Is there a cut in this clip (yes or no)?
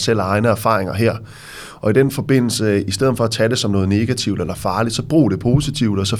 no